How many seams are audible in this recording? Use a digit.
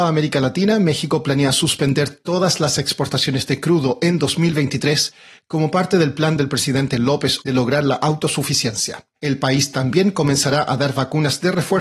2